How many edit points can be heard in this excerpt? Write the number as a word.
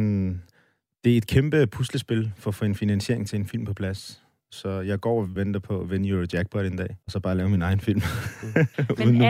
two